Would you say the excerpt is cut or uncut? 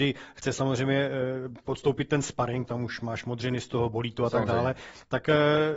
cut